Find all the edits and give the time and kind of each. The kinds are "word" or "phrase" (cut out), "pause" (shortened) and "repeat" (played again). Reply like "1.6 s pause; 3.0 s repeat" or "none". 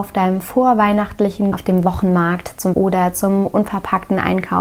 1.5 s word; 2.7 s word